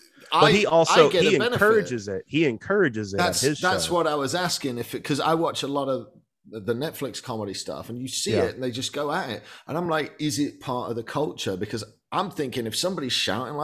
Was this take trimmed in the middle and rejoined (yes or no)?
no